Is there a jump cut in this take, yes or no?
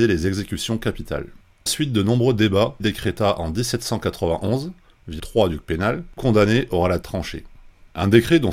yes